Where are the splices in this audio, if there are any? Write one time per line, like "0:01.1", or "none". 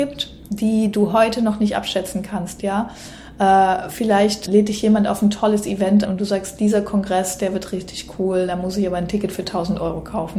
0:04.5
0:06.0